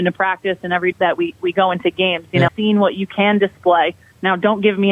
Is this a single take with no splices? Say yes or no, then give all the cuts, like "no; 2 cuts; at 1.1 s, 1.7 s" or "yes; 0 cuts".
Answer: no; 2 cuts; at 0.9 s, 2.5 s